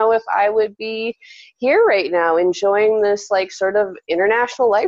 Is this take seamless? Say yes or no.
yes